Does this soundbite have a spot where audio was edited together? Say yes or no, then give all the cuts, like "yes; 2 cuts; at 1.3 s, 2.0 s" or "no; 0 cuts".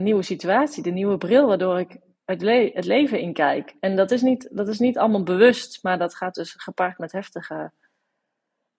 no; 0 cuts